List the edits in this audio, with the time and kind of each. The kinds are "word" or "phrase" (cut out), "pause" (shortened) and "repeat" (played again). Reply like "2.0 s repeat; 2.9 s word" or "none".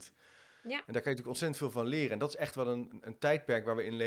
none